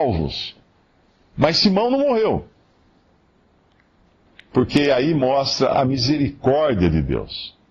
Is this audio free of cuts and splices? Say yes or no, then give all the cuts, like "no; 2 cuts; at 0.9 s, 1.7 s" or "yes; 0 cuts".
yes; 0 cuts